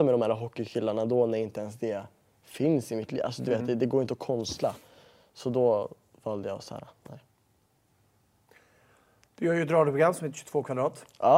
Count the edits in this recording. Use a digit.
0